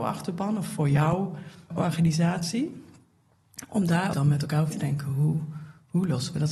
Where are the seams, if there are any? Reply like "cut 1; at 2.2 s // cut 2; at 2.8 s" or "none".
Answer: cut 1; at 1.7 s // cut 2; at 4.1 s // cut 3; at 4.7 s